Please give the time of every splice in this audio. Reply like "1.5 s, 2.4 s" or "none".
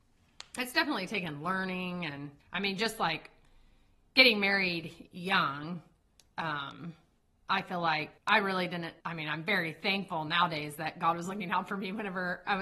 2.4 s, 7.2 s, 8.2 s, 9.0 s